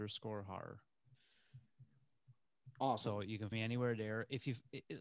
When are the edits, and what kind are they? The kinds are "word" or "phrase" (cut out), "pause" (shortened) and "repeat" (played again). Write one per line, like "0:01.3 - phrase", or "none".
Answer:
0:03.5 - word